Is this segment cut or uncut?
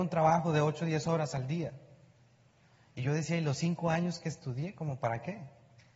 uncut